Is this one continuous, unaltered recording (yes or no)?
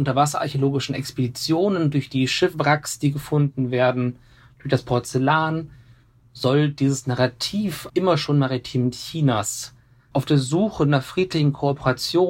no